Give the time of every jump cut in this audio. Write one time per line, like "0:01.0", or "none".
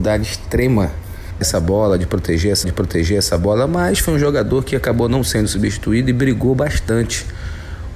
0:01.4
0:02.6